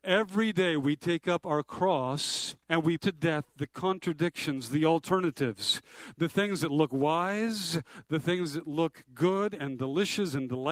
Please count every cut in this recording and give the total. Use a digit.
2